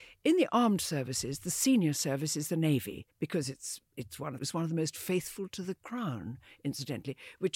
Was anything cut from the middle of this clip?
yes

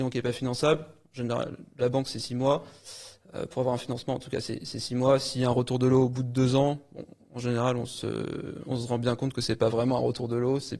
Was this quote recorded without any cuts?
yes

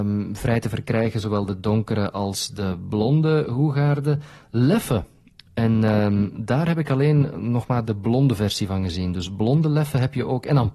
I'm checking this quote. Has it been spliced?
no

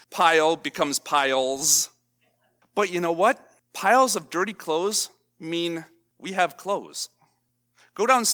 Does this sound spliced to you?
no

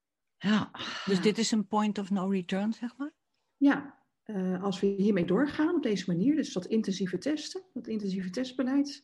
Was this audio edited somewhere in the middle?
no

